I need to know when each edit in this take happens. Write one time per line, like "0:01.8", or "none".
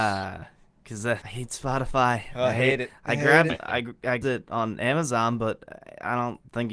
0:01.2
0:03.5
0:04.2